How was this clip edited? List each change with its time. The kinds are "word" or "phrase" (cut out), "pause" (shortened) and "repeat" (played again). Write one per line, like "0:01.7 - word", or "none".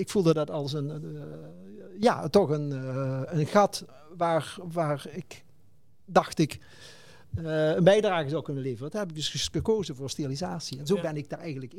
none